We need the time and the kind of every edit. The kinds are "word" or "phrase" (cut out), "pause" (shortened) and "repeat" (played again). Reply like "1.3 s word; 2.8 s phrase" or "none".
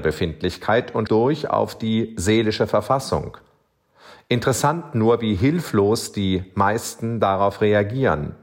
1.1 s word